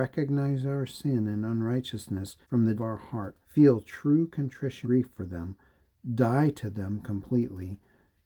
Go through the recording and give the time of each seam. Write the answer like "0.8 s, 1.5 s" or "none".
2.4 s, 2.8 s, 3.4 s, 4.8 s